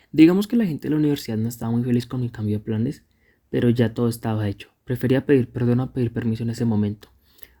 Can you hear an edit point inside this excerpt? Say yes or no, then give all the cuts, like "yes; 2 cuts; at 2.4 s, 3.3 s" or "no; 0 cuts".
no; 0 cuts